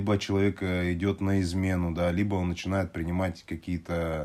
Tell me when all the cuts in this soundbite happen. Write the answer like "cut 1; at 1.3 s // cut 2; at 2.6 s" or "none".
none